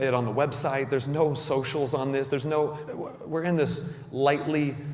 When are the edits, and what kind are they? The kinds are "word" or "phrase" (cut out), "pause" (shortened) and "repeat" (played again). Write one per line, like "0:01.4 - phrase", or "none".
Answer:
0:02.9 - word